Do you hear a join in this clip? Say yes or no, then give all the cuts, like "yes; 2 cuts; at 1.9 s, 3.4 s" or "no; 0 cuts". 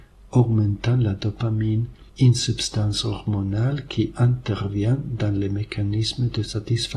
yes; 1 cut; at 2.1 s